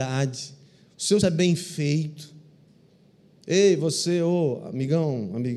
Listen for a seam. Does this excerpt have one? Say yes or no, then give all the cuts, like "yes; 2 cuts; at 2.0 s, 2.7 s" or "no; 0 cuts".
yes; 1 cut; at 1.2 s